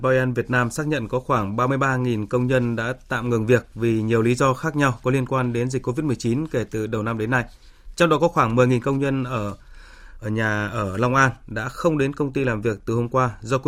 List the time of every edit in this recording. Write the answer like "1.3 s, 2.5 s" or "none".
none